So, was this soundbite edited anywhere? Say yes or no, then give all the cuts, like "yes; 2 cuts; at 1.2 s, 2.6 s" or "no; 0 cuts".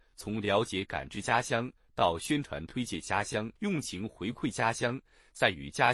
yes; 1 cut; at 3.6 s